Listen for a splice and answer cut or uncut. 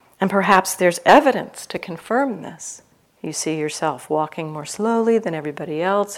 cut